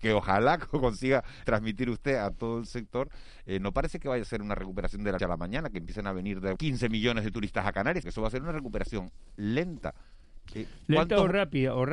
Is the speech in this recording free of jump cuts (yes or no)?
no